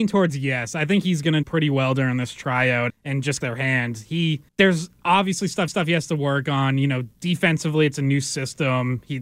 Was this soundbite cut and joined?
yes; 5 cuts; at 1.4 s, 2.9 s, 3.4 s, 4.5 s, 5.7 s

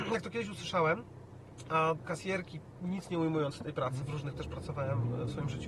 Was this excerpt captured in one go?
no; 3 cuts; at 2.0 s, 4.0 s, 4.3 s

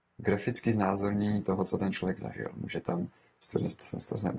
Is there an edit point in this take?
no; 0 cuts

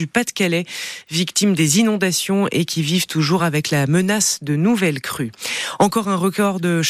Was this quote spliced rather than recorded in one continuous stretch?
no; 0 cuts

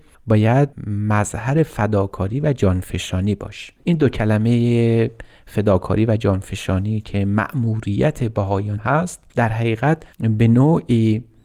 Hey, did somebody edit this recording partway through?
yes; 4 cuts; at 3.8 s, 8.8 s, 9.3 s, 10.1 s

